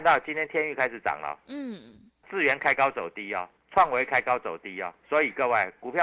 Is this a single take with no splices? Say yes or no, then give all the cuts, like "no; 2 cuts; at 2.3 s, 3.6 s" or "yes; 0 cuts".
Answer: no; 3 cuts; at 2.2 s, 3.6 s, 5.0 s